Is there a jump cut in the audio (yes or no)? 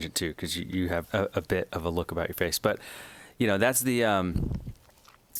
yes